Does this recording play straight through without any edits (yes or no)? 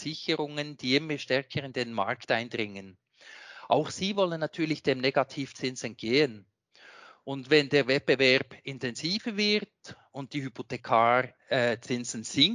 yes